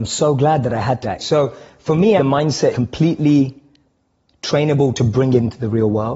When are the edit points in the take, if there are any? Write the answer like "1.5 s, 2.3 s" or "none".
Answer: 1.0 s, 2.2 s, 2.7 s